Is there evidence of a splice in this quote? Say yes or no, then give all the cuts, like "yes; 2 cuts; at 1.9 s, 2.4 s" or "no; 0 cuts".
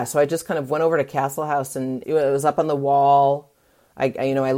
yes; 1 cut; at 2.0 s